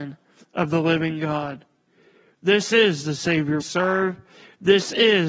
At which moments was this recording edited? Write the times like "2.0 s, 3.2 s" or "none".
3.6 s